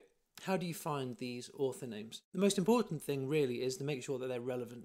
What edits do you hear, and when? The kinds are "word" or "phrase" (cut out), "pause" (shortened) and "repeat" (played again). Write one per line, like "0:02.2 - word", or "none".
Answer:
0:02.3 - pause